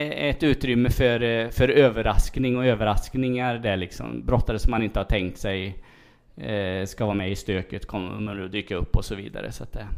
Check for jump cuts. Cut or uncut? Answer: uncut